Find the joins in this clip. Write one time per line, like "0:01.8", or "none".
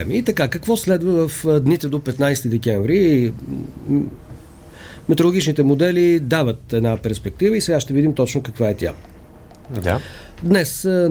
none